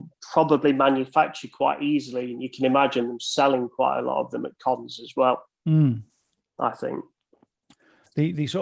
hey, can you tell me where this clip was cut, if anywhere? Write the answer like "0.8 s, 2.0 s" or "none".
none